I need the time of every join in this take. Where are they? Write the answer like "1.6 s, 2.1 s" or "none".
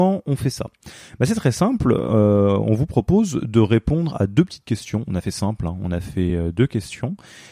none